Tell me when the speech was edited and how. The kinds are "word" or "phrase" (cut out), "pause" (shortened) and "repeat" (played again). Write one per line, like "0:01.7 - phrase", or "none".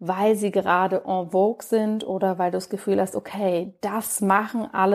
none